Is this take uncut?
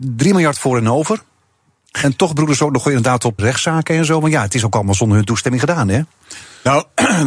no; 1 cut; at 3.4 s

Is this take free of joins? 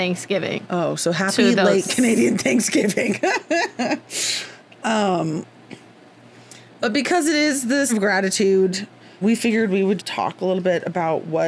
no; 3 cuts; at 7.9 s, 9.2 s, 10.0 s

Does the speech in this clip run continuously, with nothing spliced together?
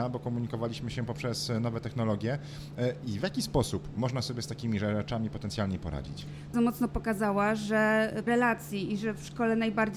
no; 2 cuts; at 6.5 s, 8.3 s

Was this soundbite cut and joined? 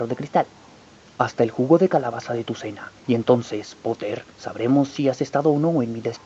yes; 2 cuts; at 3.0 s, 4.3 s

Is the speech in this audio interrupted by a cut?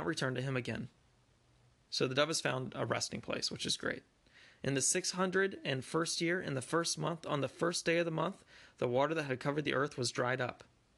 no; 0 cuts

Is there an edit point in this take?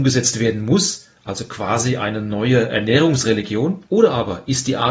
yes; 1 cut; at 3.9 s

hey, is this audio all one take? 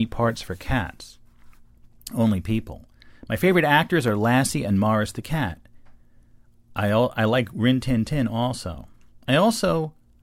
yes; 0 cuts

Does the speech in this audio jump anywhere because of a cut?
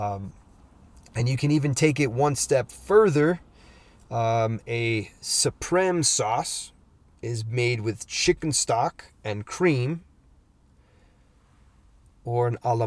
no; 0 cuts

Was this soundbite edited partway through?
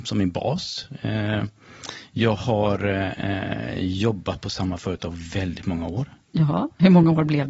no; 0 cuts

